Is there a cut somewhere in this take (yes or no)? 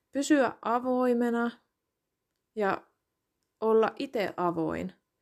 no